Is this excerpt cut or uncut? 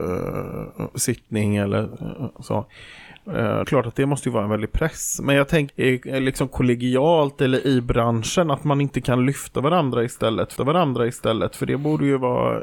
cut